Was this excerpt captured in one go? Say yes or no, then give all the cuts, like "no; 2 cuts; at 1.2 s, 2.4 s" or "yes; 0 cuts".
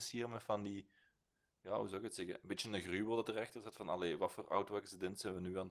yes; 0 cuts